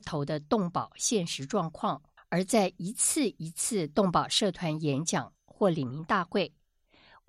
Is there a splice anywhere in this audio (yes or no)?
yes